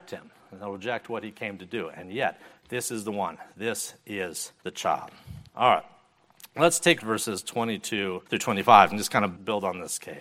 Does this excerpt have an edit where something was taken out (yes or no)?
yes